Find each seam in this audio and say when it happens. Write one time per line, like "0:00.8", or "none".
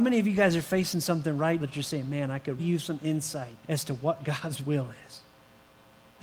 0:01.6
0:02.6
0:03.6